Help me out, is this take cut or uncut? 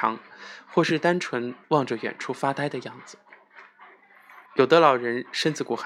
cut